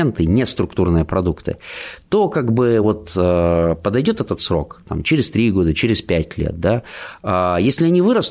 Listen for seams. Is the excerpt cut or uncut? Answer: uncut